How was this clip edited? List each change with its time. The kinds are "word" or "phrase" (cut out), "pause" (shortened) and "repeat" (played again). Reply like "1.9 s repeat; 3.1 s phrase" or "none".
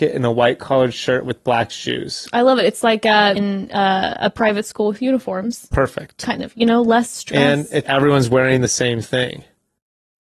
3.4 s word; 7.8 s word